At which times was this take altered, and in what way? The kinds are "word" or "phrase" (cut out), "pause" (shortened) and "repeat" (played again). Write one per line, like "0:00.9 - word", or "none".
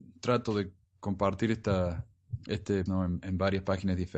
0:02.9 - word